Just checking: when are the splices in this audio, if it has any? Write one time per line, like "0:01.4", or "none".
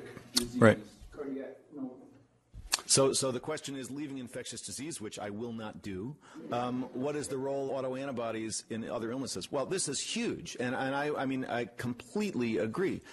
0:07.7